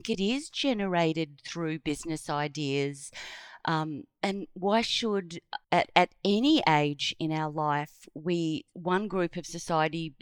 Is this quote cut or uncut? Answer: cut